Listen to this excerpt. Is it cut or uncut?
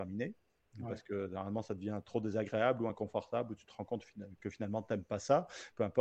uncut